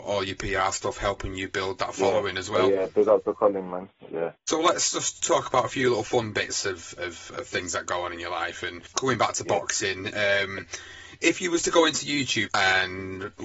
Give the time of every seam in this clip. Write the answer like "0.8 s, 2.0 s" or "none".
12.5 s